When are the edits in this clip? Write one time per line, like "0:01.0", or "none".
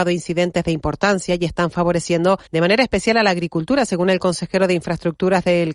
0:02.5